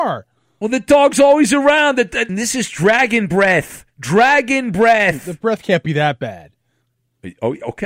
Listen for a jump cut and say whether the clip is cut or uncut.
cut